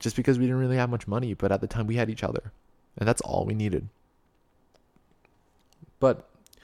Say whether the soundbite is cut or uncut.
uncut